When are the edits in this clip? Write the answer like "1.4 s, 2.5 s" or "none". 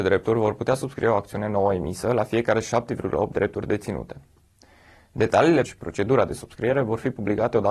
5.7 s